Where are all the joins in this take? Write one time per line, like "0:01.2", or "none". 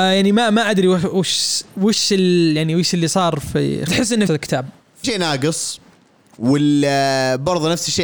0:03.9
0:04.3
0:05.0